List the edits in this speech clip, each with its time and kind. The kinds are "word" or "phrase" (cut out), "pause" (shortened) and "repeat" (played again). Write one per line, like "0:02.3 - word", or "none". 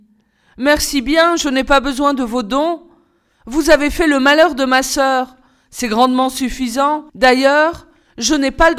0:07.1 - pause